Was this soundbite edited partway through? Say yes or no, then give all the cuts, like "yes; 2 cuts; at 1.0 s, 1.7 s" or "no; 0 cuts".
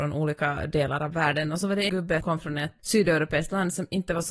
yes; 3 cuts; at 1.9 s, 2.2 s, 2.8 s